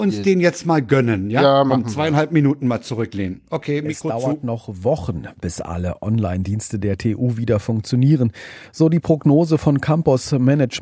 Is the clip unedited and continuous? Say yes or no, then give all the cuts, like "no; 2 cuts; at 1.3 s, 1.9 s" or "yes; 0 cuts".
yes; 0 cuts